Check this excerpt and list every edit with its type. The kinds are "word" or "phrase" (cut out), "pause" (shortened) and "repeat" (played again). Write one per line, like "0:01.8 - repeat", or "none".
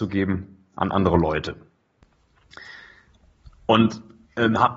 none